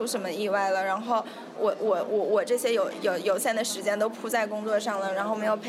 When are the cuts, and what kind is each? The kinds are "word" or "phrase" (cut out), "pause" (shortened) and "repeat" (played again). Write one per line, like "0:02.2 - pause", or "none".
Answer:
0:01.6 - word